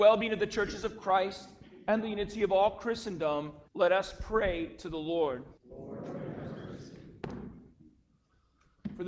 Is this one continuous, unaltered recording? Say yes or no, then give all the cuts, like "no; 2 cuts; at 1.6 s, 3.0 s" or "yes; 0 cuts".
no; 3 cuts; at 2.0 s, 3.7 s, 5.6 s